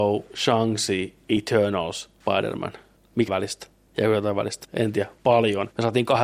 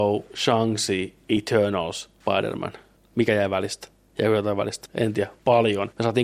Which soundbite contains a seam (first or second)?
first